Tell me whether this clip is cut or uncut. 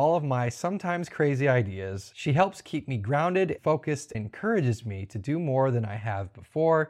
cut